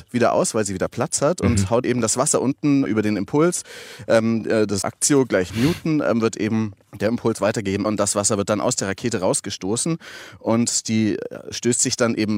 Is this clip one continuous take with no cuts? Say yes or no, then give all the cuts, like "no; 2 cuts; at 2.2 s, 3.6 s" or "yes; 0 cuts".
no; 6 cuts; at 1.8 s, 2.9 s, 4.8 s, 5.5 s, 6.8 s, 7.8 s